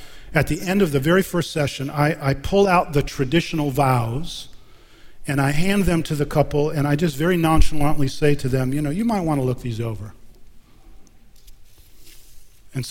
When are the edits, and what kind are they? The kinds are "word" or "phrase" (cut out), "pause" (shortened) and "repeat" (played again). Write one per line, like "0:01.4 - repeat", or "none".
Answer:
none